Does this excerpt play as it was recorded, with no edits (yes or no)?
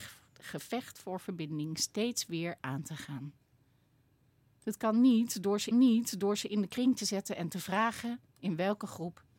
no